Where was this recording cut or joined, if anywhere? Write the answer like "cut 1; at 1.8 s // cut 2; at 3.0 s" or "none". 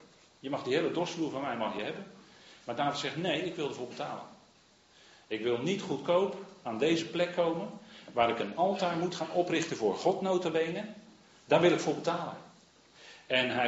none